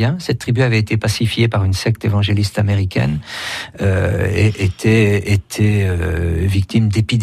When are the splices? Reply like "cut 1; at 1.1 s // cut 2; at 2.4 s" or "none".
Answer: none